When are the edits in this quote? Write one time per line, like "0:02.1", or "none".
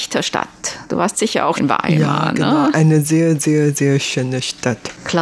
0:01.6